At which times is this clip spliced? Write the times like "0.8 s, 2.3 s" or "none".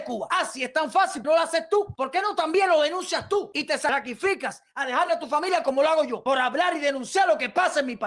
1.2 s, 5.1 s